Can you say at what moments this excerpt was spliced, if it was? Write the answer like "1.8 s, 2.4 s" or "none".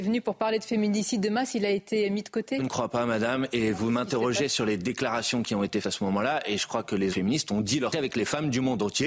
2.6 s, 5.8 s, 7.1 s, 7.9 s